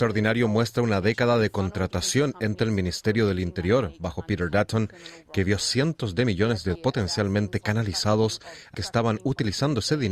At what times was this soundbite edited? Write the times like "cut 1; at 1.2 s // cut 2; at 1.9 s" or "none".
cut 1; at 6.7 s // cut 2; at 8.7 s